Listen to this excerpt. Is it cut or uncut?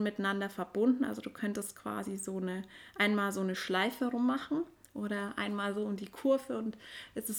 uncut